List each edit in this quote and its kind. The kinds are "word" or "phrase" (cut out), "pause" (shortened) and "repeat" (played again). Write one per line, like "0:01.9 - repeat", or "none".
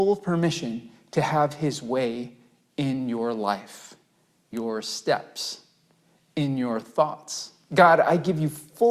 0:04.5 - word